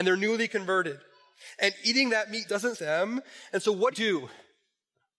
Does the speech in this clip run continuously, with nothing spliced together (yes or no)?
no